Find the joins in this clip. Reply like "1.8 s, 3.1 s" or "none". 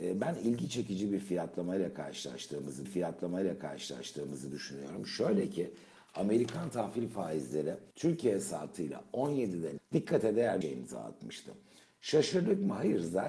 2.8 s, 7.9 s, 9.8 s, 10.6 s